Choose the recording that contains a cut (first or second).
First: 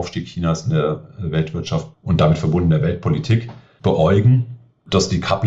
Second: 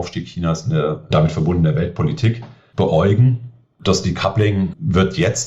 second